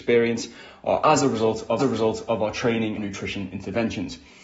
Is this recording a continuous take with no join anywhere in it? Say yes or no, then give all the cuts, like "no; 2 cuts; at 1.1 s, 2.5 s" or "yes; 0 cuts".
no; 2 cuts; at 1.8 s, 3.0 s